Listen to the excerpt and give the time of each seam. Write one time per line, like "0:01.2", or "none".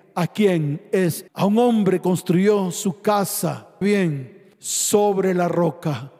0:01.3
0:02.0
0:03.8